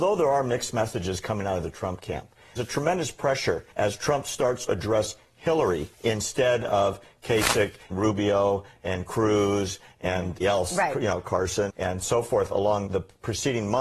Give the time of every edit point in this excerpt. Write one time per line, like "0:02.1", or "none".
0:02.6
0:03.7
0:04.7
0:05.9
0:07.9
0:10.4
0:11.7
0:12.9